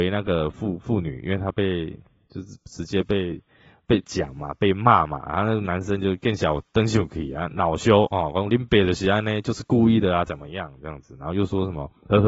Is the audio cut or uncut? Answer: uncut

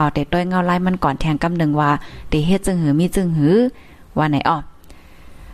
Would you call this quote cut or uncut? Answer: uncut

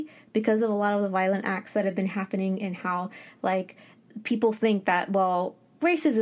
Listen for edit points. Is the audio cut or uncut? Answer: uncut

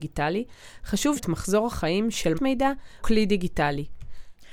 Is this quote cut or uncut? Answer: cut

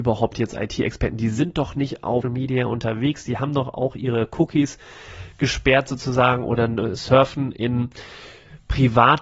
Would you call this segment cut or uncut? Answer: cut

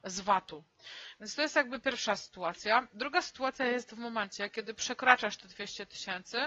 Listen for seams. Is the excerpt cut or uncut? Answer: uncut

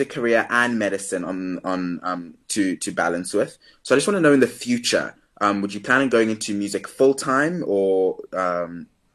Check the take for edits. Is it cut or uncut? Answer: uncut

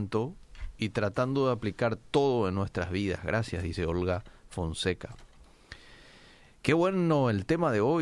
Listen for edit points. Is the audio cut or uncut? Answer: uncut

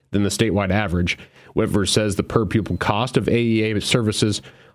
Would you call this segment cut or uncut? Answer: uncut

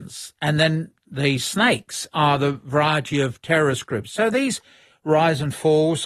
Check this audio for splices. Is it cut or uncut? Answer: uncut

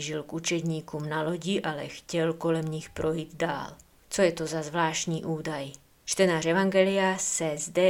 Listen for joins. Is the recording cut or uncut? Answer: uncut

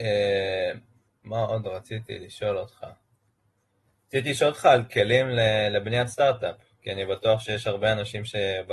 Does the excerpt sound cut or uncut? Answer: uncut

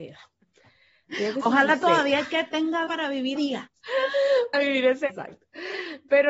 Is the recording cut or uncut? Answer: cut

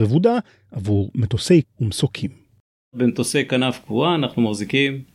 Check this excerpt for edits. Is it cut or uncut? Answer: cut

